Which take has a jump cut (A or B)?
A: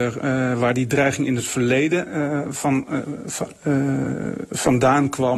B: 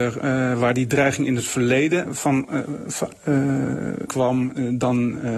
B